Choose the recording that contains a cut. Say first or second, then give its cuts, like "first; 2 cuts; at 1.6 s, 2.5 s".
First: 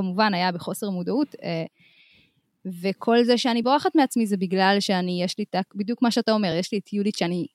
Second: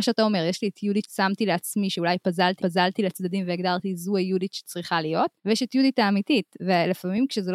second; 3 cuts; at 1.0 s, 2.6 s, 5.4 s